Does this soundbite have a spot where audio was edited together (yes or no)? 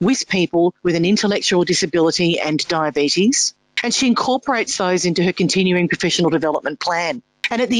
no